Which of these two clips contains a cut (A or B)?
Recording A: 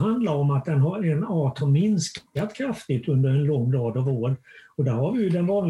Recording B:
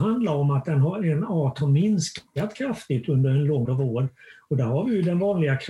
B